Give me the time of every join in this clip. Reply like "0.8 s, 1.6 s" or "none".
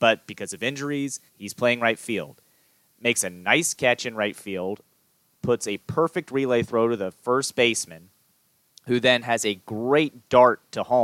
1.3 s